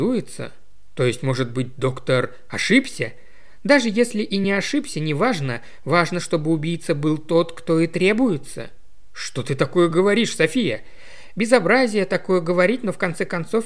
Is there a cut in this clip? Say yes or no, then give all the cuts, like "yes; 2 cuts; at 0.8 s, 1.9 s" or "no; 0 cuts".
no; 0 cuts